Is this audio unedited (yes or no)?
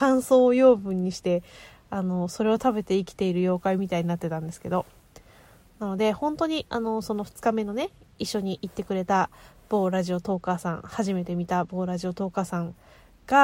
yes